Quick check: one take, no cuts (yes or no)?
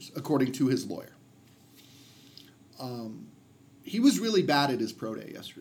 yes